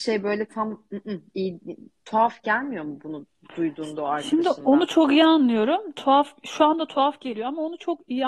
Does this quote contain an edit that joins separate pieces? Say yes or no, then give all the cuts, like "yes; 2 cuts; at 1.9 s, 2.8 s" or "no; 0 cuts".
no; 0 cuts